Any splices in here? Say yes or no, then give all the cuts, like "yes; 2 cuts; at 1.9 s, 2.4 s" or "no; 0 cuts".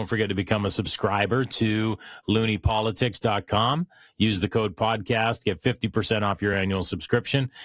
no; 0 cuts